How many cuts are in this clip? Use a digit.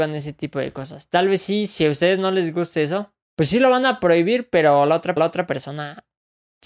2